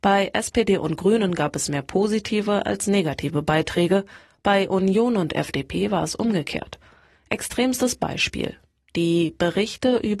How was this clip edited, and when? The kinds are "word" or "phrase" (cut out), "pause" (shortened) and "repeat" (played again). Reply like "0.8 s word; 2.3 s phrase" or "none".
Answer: none